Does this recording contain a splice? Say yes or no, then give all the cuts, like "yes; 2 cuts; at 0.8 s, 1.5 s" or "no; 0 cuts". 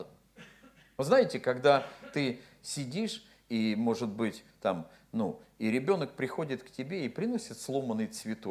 no; 0 cuts